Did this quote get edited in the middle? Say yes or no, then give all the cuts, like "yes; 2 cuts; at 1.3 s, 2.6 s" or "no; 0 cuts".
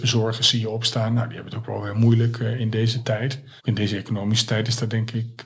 yes; 1 cut; at 3.6 s